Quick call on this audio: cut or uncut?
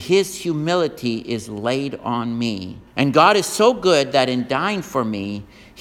cut